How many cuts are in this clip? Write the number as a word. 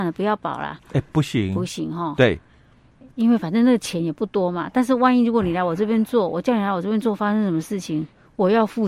zero